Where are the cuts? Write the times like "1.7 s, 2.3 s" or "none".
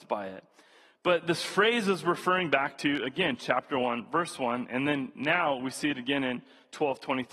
none